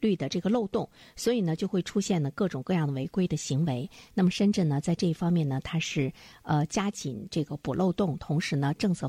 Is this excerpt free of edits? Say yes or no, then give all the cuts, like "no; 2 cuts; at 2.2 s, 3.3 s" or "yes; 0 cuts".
yes; 0 cuts